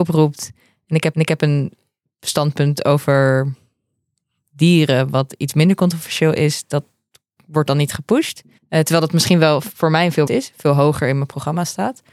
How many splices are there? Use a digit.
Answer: 3